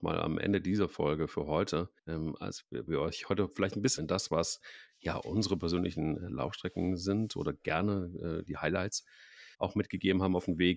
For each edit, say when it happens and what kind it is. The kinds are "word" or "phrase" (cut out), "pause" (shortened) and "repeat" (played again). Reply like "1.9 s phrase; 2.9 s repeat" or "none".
2.0 s pause; 2.9 s word; 4.0 s phrase; 8.5 s word; 9.5 s pause